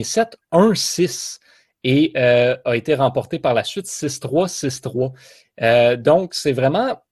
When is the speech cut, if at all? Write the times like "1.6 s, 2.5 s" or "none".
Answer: none